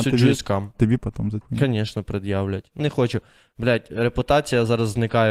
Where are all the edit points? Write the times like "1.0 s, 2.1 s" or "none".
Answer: 1.0 s, 1.4 s, 2.8 s

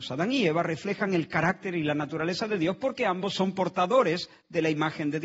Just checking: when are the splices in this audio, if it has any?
none

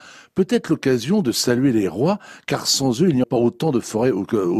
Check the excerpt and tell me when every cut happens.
3.2 s

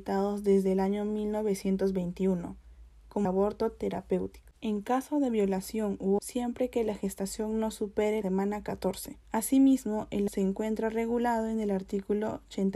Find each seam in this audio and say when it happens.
3.2 s, 4.6 s, 6.2 s, 8.2 s, 9.2 s, 10.3 s

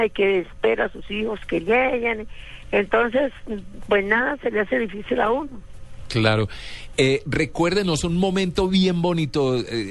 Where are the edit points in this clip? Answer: none

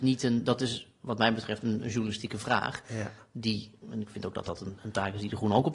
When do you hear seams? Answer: none

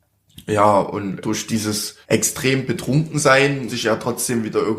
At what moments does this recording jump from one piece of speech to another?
1.2 s, 2.0 s, 3.7 s

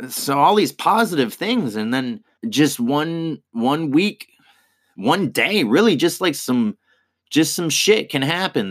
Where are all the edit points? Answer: 2.4 s

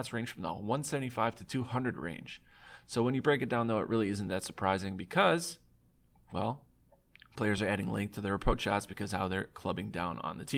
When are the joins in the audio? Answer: none

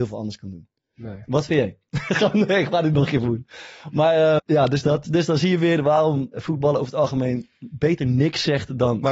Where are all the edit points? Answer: 4.4 s, 5.0 s, 6.3 s

